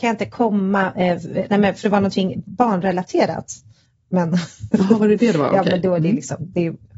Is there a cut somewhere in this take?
no; 0 cuts

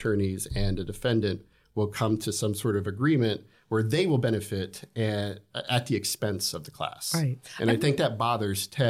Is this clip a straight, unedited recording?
yes; 0 cuts

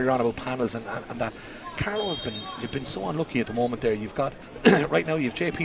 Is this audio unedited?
no; 1 cut; at 4.4 s

